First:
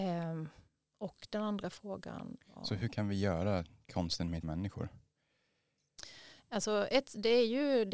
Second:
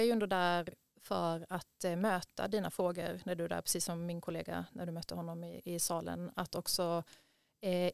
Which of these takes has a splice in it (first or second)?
first